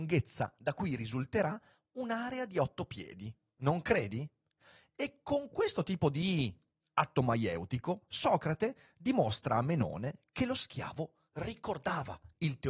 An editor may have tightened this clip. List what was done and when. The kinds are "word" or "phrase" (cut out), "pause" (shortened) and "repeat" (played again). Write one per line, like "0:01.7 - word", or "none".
none